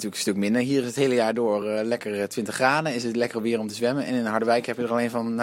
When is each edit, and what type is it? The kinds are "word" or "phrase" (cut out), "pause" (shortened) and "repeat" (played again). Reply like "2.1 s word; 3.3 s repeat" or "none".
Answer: none